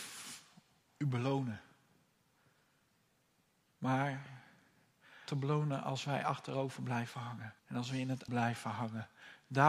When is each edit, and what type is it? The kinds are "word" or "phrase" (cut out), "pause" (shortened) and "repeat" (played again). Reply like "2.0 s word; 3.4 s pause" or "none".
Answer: 5.3 s phrase; 7.6 s pause; 8.3 s word